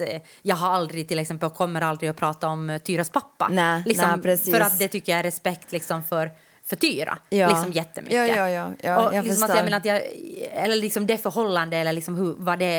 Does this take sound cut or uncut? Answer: uncut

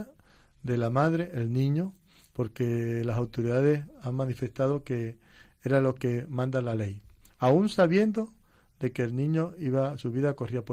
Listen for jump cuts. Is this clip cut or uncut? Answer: uncut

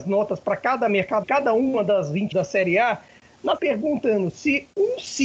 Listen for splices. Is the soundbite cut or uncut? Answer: cut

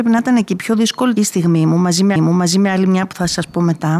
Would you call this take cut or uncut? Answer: cut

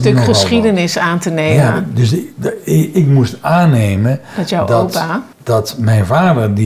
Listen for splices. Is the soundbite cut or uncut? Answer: cut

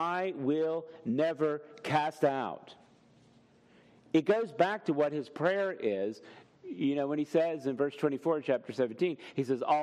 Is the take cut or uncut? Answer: uncut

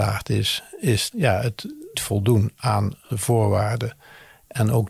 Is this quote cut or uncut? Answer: cut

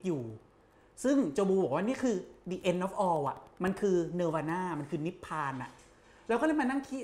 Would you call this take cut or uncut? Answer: uncut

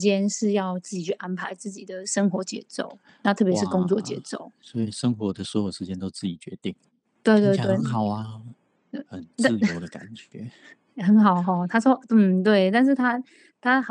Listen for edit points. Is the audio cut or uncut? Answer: uncut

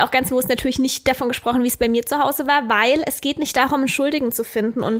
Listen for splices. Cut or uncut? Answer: uncut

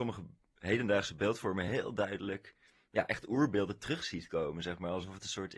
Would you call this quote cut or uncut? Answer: uncut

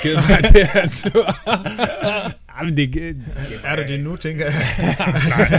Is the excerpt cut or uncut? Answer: uncut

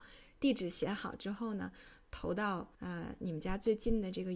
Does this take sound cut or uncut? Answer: cut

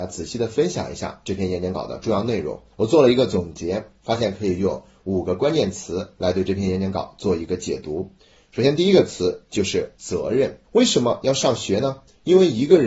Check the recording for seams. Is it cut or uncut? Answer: cut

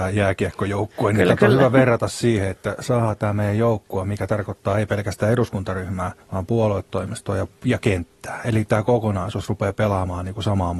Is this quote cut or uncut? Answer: cut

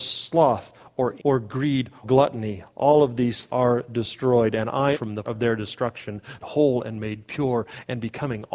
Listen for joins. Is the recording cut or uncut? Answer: cut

